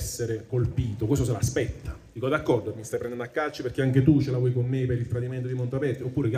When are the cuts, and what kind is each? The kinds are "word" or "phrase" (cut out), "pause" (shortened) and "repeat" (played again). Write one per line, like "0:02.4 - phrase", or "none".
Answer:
none